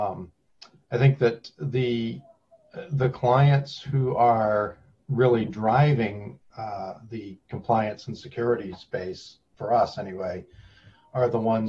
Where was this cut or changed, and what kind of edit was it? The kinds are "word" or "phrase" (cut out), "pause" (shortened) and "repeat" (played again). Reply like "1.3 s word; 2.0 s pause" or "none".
6.4 s word